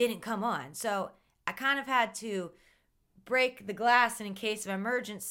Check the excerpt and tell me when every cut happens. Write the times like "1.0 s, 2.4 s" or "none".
none

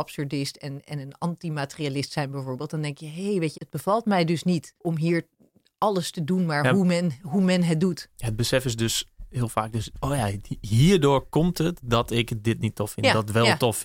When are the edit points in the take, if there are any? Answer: 3.5 s, 4.8 s

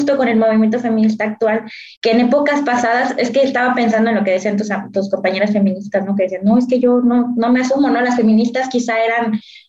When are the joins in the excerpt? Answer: 1.9 s

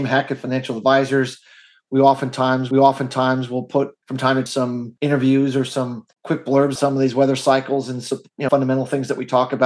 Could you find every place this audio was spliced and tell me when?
2.7 s, 4.0 s, 4.5 s, 5.0 s, 6.1 s, 6.8 s, 8.5 s

